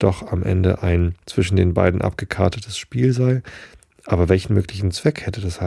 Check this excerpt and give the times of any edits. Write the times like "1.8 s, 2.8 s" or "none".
1.2 s